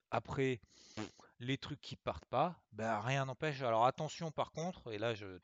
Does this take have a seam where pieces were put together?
no; 0 cuts

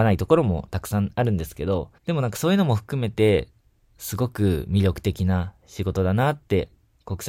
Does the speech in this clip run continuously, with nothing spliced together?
no; 1 cut; at 2.0 s

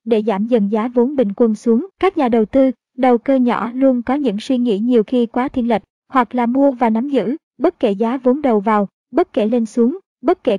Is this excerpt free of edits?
no; 2 cuts; at 1.9 s, 5.9 s

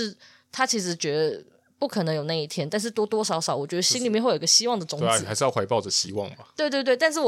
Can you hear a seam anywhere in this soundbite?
no; 0 cuts

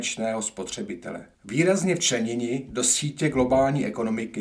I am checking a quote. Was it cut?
yes; 1 cut; at 1.3 s

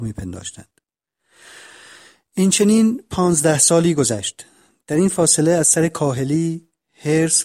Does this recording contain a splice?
no; 0 cuts

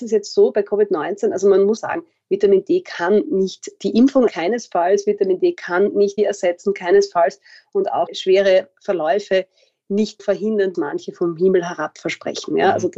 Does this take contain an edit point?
yes; 6 cuts; at 1.8 s, 4.3 s, 6.2 s, 8.1 s, 10.2 s, 10.7 s

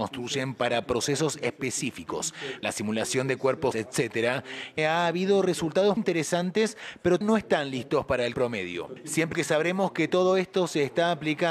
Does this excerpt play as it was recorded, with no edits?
no; 7 cuts; at 2.6 s, 3.7 s, 4.8 s, 6.0 s, 7.2 s, 8.3 s, 9.3 s

